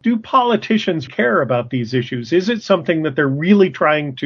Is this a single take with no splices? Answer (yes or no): no